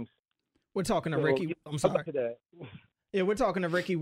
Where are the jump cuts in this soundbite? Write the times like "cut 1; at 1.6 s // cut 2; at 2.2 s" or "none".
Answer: cut 1; at 2.1 s